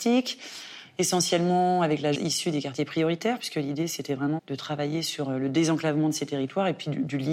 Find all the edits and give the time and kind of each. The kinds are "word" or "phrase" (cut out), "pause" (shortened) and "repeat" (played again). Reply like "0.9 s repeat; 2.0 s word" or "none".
2.1 s word; 4.4 s word